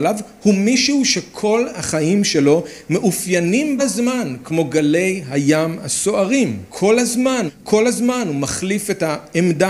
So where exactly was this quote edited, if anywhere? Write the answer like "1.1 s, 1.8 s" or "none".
3.8 s, 6.7 s, 7.5 s